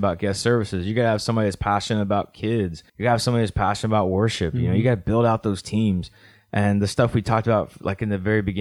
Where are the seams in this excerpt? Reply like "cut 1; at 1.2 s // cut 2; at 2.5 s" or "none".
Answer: cut 1; at 2.9 s